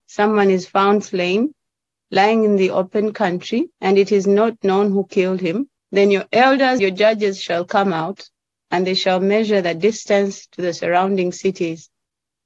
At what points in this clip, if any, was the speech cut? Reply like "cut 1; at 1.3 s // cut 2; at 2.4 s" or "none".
cut 1; at 3.7 s // cut 2; at 5.8 s // cut 3; at 6.8 s